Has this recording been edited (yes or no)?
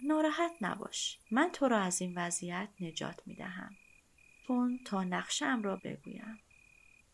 yes